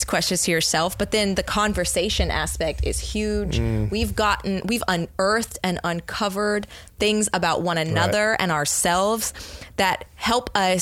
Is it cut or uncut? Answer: uncut